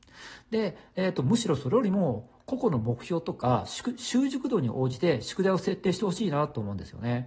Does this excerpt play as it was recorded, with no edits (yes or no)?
yes